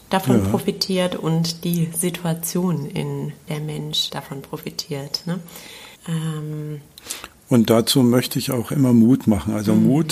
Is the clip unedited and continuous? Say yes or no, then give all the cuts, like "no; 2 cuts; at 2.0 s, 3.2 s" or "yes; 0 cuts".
no; 3 cuts; at 3.5 s, 4.1 s, 6.0 s